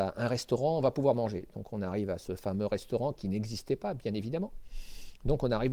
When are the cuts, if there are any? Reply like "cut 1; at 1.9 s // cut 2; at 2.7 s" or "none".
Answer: none